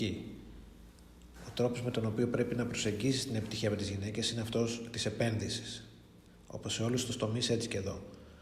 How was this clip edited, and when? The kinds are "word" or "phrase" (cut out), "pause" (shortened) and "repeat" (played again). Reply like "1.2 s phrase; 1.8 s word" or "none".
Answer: none